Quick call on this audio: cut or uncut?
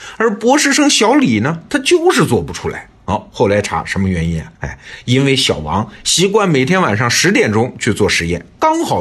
cut